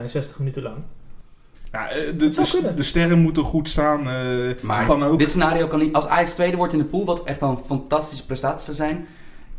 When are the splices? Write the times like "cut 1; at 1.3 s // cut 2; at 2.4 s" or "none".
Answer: cut 1; at 4.9 s